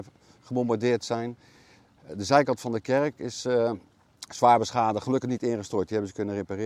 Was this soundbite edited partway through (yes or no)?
no